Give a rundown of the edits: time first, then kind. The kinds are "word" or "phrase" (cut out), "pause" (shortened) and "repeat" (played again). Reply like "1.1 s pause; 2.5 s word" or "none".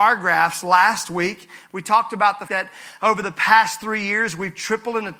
2.5 s word